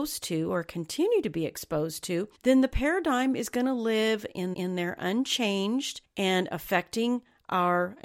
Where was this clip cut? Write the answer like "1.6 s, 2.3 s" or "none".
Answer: 2.3 s, 4.5 s, 6.0 s